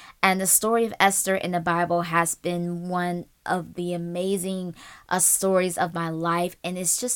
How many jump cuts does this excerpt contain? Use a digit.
0